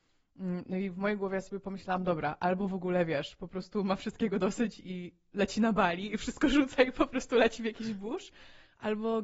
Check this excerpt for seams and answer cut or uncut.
uncut